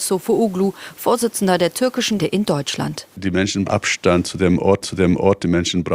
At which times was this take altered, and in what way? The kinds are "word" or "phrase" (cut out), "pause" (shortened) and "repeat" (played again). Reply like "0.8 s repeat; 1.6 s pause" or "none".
2.2 s word; 3.1 s pause; 3.6 s word; 4.8 s repeat